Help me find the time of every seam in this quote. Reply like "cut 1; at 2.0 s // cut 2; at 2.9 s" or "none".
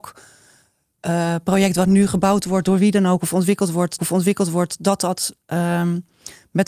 cut 1; at 4.0 s